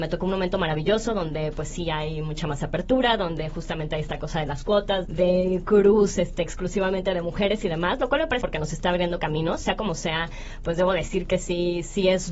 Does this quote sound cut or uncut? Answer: cut